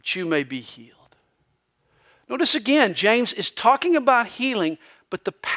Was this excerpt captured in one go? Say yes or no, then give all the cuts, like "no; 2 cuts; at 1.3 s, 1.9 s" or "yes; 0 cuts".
yes; 0 cuts